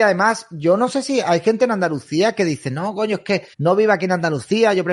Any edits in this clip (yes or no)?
yes